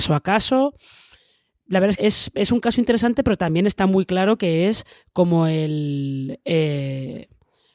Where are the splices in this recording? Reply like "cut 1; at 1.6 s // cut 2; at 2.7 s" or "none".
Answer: cut 1; at 2.0 s